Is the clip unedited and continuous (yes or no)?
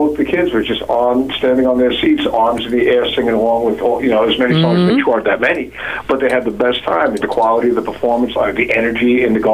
no